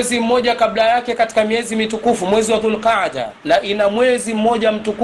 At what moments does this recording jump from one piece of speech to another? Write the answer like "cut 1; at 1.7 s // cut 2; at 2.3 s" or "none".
none